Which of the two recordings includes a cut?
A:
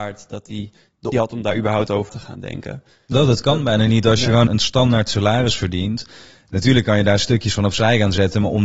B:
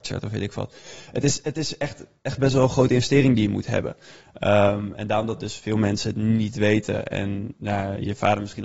A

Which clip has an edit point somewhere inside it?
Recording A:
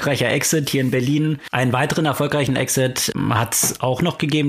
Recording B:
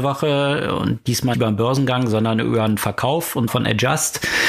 B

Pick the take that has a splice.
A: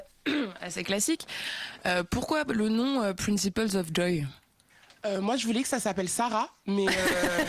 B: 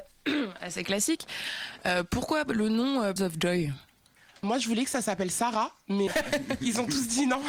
B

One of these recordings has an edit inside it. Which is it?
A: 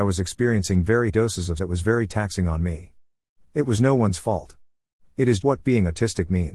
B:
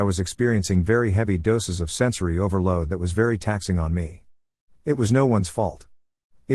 A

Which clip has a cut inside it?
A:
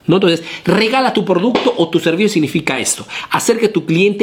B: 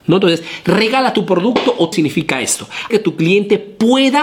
B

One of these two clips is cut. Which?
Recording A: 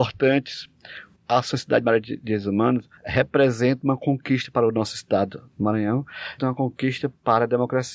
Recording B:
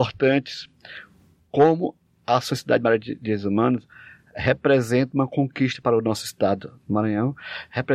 A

